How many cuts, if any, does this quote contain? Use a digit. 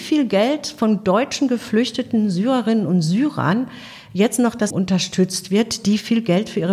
1